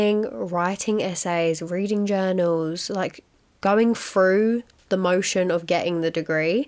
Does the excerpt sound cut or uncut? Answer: uncut